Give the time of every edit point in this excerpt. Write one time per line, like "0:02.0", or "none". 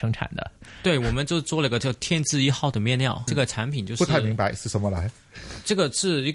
0:03.3